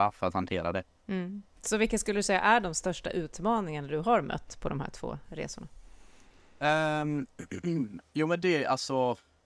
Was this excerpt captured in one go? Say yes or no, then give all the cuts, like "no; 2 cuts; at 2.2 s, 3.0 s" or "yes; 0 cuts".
yes; 0 cuts